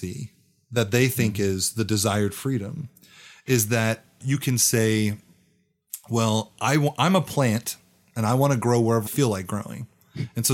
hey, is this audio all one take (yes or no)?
no